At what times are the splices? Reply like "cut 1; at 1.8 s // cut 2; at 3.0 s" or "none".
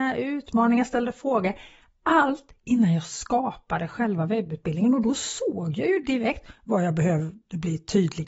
none